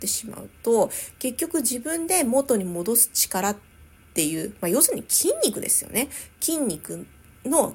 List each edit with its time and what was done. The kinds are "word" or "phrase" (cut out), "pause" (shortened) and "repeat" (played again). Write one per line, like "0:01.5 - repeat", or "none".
none